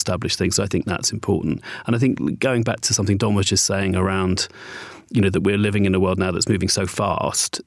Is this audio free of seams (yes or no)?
yes